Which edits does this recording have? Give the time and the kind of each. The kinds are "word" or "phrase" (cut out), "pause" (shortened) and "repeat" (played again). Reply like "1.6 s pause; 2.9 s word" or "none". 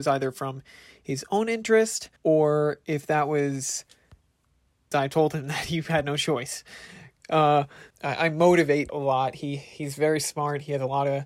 2.2 s pause; 4.9 s phrase; 7.9 s pause; 8.9 s word